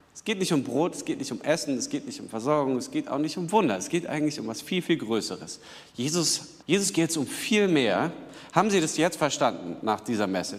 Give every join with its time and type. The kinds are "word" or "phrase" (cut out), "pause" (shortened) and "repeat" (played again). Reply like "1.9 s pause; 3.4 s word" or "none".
6.6 s pause